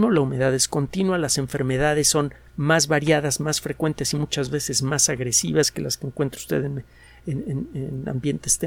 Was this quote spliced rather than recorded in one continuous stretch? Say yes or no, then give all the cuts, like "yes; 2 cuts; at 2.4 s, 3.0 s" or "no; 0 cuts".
no; 0 cuts